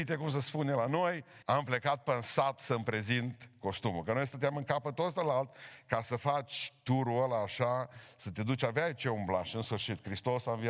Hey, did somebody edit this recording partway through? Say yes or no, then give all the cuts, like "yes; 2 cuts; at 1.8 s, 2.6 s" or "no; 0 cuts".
yes; 1 cut; at 1.4 s